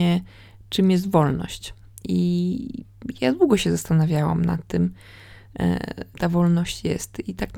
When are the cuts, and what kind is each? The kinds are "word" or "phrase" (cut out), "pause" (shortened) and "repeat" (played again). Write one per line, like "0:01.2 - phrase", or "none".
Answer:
0:06.1 - word